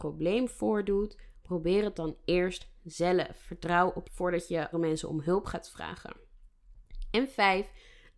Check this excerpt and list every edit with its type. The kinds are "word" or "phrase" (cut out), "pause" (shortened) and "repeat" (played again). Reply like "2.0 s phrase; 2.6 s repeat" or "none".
4.0 s word; 4.7 s word